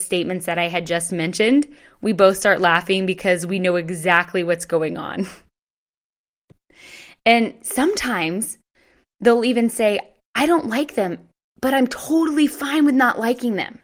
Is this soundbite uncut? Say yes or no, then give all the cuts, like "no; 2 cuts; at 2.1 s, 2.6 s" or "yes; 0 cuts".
yes; 0 cuts